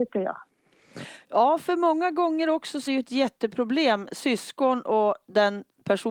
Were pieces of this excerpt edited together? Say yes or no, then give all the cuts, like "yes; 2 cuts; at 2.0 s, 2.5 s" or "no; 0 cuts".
yes; 1 cut; at 2.9 s